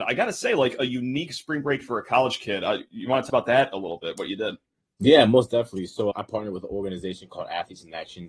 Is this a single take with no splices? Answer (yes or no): no